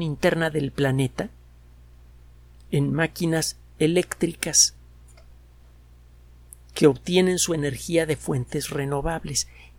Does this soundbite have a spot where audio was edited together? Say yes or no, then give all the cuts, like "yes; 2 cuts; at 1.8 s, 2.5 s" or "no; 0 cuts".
no; 0 cuts